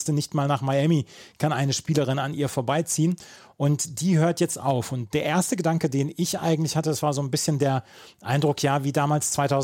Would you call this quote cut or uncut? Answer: uncut